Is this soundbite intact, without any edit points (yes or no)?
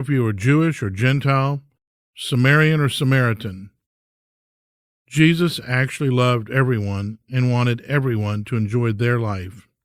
yes